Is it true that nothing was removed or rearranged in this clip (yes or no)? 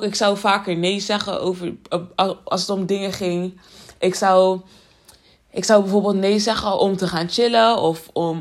yes